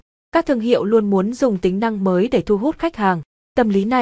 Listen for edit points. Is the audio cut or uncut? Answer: uncut